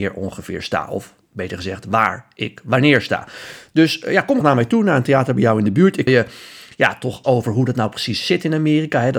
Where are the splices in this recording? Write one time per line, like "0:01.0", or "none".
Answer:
0:04.4
0:06.1
0:07.2